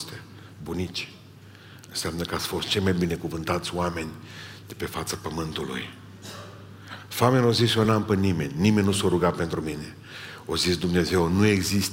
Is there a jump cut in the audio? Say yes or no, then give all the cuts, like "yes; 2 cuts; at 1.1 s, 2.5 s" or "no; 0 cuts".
no; 0 cuts